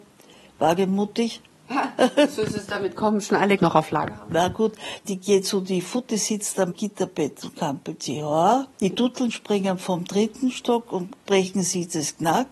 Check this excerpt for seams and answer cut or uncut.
cut